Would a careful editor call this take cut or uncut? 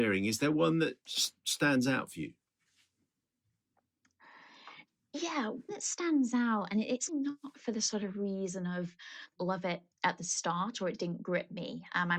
cut